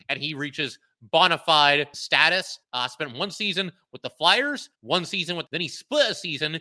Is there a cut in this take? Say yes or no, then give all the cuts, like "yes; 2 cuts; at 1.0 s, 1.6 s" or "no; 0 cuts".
yes; 4 cuts; at 1.9 s, 2.6 s, 4.7 s, 5.5 s